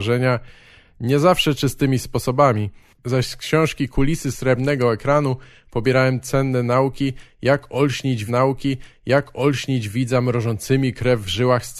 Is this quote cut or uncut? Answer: cut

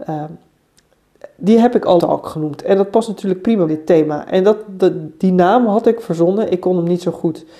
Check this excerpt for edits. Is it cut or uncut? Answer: cut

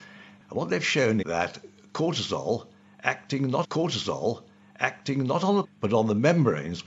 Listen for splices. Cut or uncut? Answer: cut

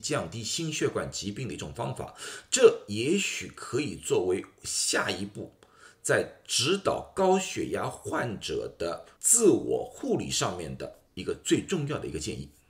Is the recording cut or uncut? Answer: cut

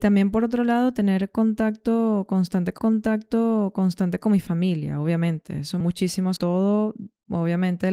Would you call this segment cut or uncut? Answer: cut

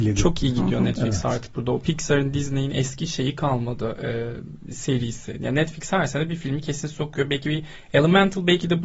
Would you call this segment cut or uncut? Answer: uncut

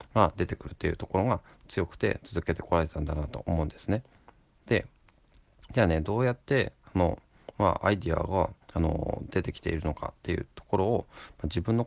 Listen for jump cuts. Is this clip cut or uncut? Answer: cut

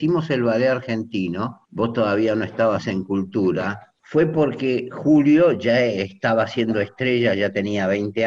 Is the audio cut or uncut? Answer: cut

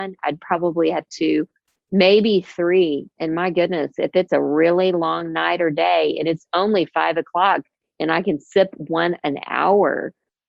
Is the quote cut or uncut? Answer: uncut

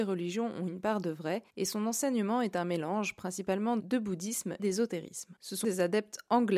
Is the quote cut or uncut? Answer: cut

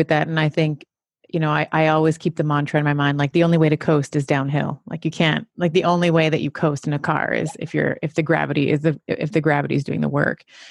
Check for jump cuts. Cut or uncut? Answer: uncut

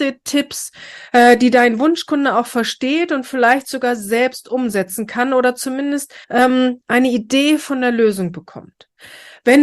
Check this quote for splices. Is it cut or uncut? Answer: cut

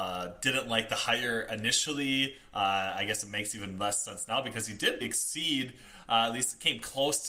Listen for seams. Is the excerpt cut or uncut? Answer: cut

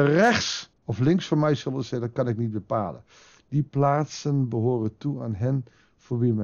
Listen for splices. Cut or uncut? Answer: uncut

